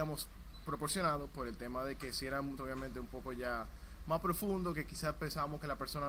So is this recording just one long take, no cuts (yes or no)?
no